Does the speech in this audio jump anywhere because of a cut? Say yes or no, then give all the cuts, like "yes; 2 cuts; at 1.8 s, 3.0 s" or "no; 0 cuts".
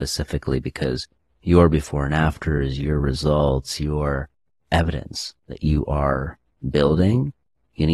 no; 0 cuts